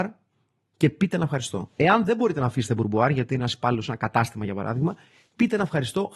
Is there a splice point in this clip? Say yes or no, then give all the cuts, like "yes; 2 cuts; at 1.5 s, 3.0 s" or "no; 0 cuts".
no; 0 cuts